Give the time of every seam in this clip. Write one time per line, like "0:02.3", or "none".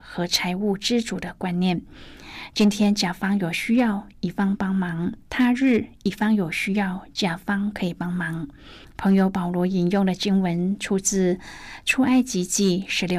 0:05.2
0:08.8